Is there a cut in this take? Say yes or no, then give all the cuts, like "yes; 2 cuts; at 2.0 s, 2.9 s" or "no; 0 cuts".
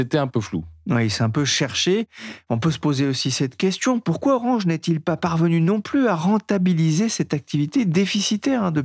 no; 0 cuts